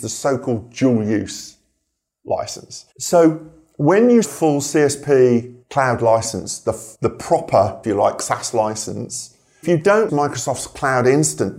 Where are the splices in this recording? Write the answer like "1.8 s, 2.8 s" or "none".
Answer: 2.9 s, 4.2 s, 5.6 s, 6.9 s, 7.8 s, 9.6 s, 10.1 s